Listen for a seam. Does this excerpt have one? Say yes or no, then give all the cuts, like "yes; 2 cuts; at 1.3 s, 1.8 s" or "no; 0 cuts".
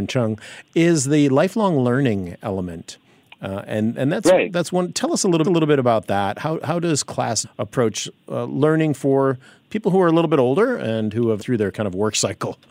yes; 3 cuts; at 5.4 s, 7.4 s, 11.4 s